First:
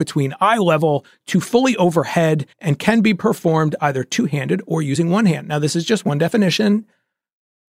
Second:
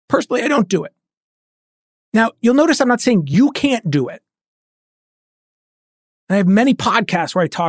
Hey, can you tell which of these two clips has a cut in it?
first; 1 cut; at 2.5 s

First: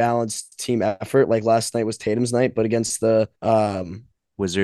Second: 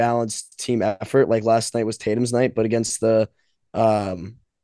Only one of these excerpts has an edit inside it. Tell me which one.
first; 1 cut; at 3.4 s

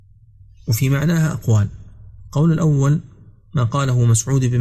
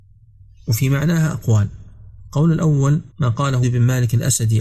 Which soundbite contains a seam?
second; 2 cuts; at 3.1 s, 3.6 s

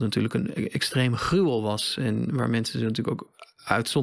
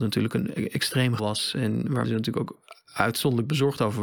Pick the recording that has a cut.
second; 2 cuts; at 1.2 s, 2.0 s

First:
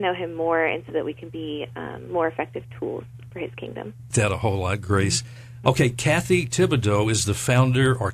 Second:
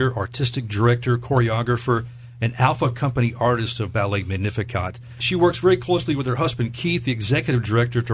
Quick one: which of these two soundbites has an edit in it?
first; 2 cuts; at 3.3 s, 4.1 s

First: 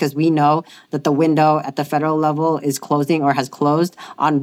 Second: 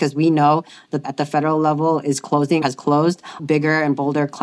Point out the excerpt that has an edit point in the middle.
second; 3 cuts; at 1.0 s, 2.6 s, 3.4 s

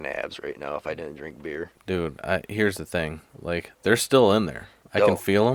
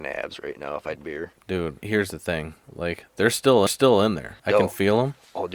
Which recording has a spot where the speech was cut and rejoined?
second; 4 cuts; at 1.0 s, 1.8 s, 3.7 s, 4.4 s

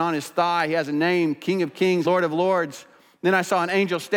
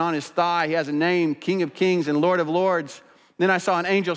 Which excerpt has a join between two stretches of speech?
first; 1 cut; at 2.0 s

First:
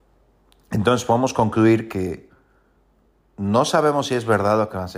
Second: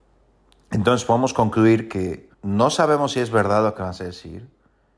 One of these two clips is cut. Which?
second; 1 cut; at 2.3 s

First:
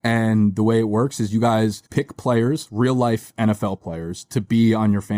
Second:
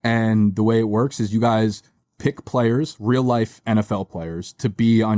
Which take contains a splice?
first; 1 cut; at 1.9 s

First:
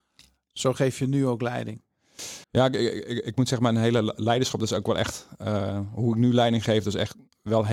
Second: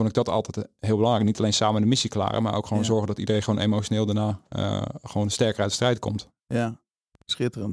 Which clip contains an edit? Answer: first; 1 cut; at 2.4 s

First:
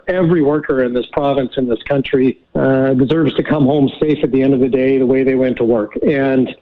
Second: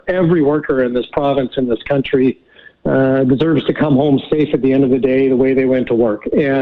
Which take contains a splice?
first; 1 cut; at 2.4 s

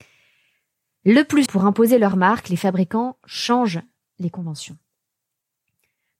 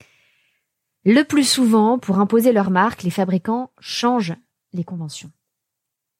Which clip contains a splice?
first; 1 cut; at 1.5 s

